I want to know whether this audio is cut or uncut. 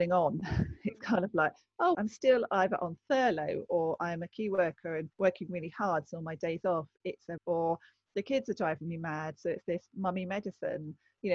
cut